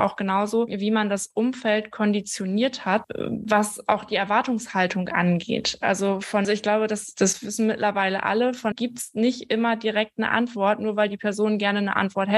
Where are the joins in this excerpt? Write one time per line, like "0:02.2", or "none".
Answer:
0:06.4
0:08.7